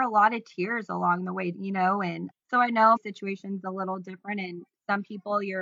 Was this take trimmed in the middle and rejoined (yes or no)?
yes